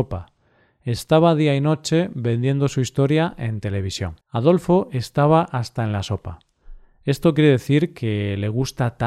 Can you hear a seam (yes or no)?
yes